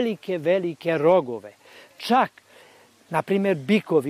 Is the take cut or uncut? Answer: uncut